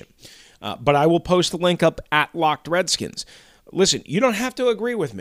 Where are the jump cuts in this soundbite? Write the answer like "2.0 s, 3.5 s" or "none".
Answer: none